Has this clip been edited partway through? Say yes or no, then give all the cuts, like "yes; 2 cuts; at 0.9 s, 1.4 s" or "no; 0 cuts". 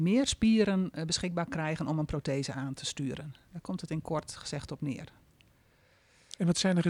no; 0 cuts